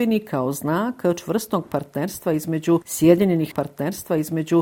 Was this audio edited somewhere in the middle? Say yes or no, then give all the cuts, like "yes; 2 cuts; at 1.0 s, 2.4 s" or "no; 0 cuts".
yes; 1 cut; at 3.5 s